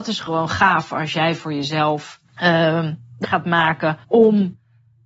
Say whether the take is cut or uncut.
cut